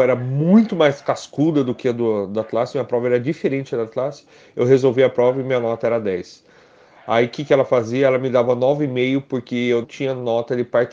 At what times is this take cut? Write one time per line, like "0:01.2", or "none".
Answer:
0:09.8